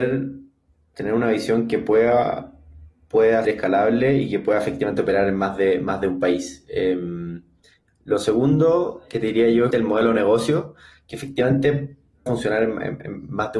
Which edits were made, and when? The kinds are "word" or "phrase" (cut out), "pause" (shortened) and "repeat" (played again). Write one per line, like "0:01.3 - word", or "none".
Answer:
0:03.4 - word
0:09.7 - word
0:12.3 - word